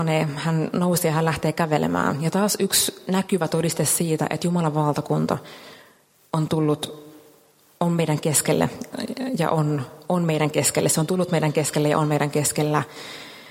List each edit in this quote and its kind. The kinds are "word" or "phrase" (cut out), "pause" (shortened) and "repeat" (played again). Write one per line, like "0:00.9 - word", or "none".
none